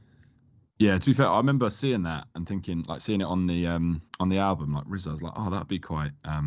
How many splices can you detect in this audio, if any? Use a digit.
1